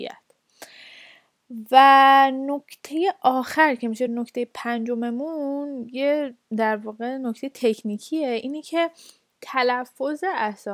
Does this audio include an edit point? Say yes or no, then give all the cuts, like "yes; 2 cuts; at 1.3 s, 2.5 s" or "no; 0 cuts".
no; 0 cuts